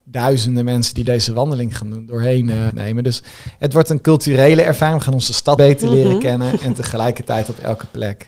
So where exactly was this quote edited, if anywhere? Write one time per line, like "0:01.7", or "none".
0:02.7
0:05.6